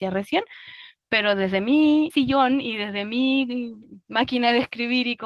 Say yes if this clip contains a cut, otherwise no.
no